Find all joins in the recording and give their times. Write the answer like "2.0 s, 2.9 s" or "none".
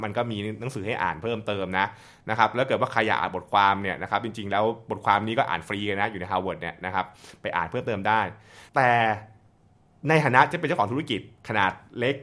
8.7 s